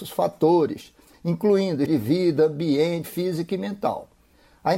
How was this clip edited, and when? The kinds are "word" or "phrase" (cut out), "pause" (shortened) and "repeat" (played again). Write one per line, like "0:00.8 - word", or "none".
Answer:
0:01.9 - word
0:03.0 - word